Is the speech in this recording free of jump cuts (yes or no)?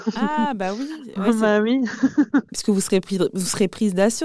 yes